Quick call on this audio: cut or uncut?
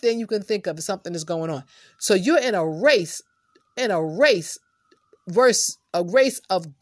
cut